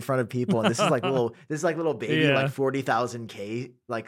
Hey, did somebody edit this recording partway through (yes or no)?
no